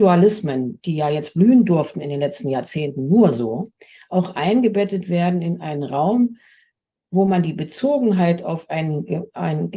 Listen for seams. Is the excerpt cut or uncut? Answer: uncut